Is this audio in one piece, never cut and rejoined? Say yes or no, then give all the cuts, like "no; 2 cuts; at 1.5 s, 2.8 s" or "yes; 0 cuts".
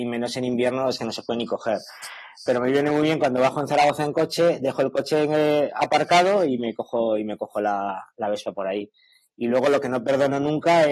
yes; 0 cuts